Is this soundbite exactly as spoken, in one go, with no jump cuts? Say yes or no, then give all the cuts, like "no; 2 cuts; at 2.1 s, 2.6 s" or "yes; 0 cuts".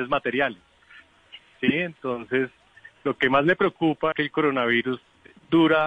no; 1 cut; at 4.1 s